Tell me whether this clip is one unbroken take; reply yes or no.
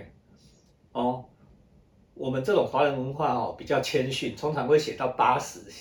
yes